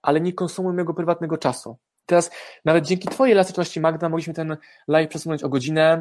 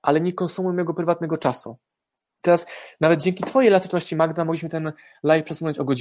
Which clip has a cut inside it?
first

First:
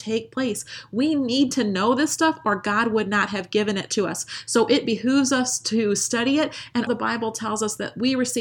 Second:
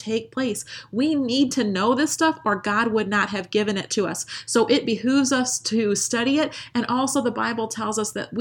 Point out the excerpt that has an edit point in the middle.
first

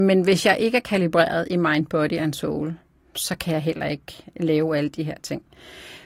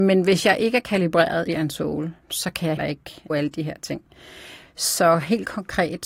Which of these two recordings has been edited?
second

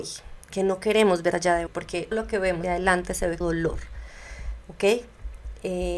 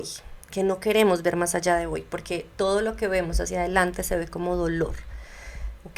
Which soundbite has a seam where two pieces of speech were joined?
first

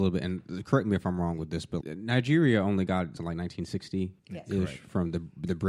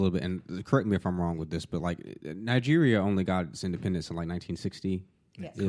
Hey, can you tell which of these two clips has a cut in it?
first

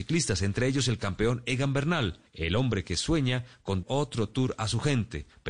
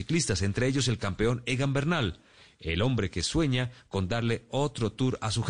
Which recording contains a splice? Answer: first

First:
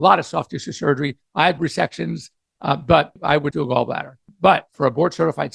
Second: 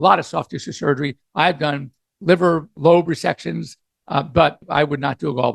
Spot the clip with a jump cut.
first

